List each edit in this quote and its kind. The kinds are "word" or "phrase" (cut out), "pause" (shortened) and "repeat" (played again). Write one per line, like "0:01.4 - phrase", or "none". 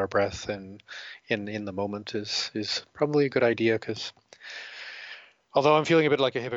none